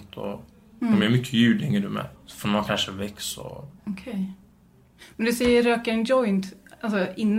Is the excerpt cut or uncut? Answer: cut